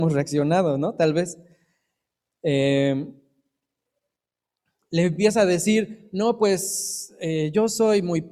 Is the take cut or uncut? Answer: uncut